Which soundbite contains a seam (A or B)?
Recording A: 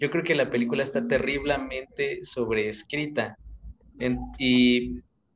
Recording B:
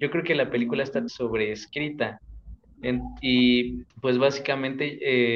B